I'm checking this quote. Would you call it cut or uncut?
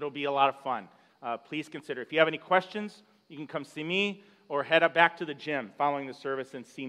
uncut